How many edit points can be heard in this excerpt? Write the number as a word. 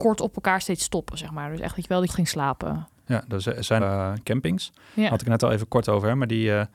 two